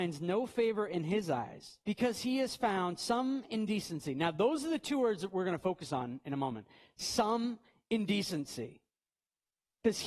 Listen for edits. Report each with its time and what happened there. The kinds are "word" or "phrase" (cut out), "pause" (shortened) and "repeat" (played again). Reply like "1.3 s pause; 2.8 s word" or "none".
1.8 s pause